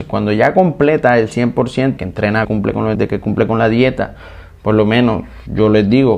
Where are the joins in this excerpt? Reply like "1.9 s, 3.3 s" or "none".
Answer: 2.0 s, 2.4 s, 2.9 s